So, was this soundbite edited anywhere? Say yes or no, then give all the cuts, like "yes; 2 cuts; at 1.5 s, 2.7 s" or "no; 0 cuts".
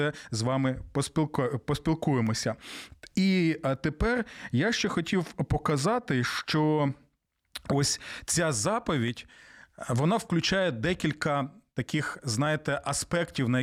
no; 0 cuts